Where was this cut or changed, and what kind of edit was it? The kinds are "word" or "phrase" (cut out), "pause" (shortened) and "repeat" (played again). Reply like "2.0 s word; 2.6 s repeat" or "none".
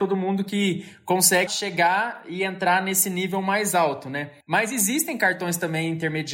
1.5 s word; 4.4 s pause